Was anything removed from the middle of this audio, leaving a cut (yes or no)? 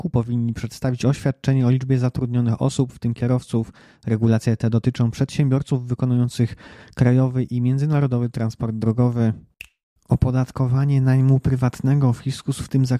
no